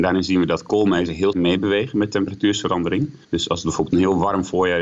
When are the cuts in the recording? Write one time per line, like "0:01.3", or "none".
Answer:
0:01.3
0:03.2

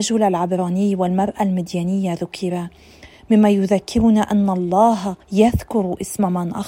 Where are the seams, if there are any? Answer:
0:05.2

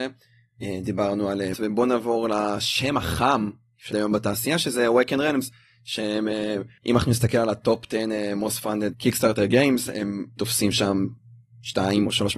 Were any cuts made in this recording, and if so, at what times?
0:01.5
0:03.9
0:10.4

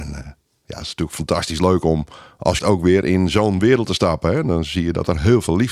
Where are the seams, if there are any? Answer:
0:02.6

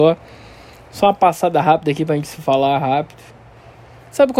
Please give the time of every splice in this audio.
none

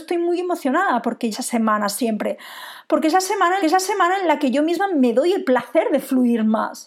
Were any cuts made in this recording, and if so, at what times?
0:01.3
0:03.6

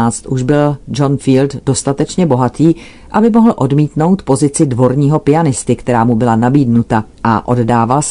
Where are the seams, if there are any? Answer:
0:07.1

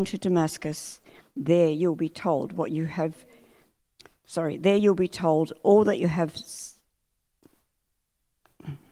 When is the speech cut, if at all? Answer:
none

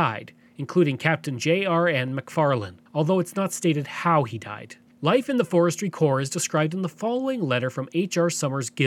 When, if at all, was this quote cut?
0:02.9
0:04.9

